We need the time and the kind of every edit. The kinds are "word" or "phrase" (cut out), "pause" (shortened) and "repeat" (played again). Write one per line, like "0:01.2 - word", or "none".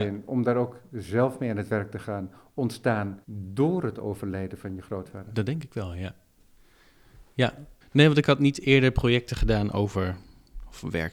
0:03.2 - pause
0:07.8 - pause